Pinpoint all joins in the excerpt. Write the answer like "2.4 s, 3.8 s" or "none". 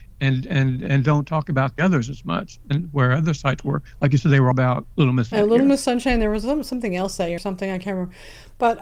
1.7 s, 4.5 s, 4.9 s, 5.3 s, 7.4 s